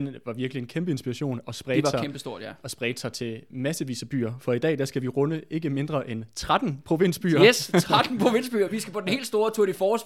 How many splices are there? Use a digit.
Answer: 0